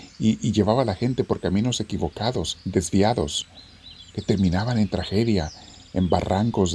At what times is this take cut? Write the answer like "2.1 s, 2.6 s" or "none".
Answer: 4.1 s